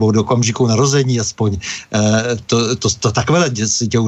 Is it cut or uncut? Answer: cut